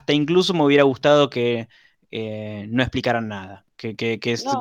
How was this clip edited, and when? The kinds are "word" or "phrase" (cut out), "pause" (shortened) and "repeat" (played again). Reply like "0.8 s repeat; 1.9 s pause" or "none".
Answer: none